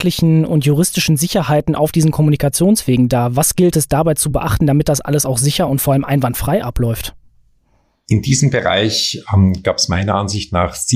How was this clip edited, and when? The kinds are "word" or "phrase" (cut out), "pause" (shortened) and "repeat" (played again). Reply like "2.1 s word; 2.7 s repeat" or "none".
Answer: none